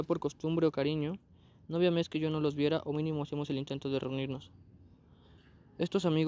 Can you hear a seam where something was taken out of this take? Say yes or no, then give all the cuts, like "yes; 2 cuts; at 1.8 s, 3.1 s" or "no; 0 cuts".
no; 0 cuts